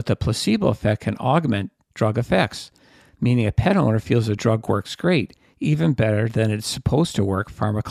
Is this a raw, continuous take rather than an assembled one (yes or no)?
yes